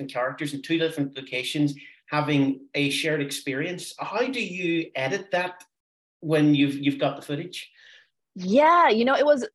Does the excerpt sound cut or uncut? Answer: uncut